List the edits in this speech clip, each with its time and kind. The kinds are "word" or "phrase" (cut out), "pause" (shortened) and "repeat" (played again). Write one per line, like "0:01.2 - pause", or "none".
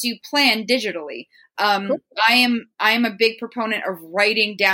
none